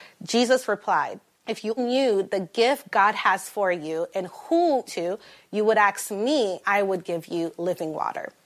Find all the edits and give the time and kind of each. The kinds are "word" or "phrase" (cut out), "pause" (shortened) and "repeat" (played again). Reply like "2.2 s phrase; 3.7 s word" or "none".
1.3 s pause; 1.8 s word; 4.9 s phrase; 6.6 s word